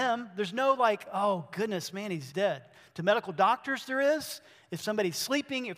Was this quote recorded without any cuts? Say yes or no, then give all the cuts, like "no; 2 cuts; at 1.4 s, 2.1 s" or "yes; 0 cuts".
no; 1 cut; at 2.3 s